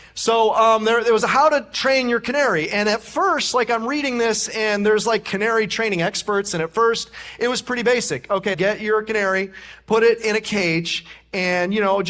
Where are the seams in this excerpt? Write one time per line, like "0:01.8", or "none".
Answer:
0:08.5